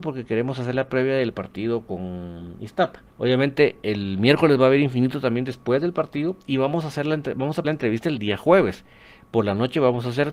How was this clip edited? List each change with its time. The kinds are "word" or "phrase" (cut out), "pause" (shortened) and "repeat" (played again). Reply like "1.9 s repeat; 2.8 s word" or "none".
3.1 s pause; 7.6 s word